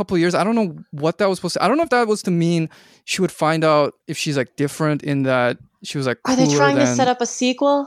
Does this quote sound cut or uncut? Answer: cut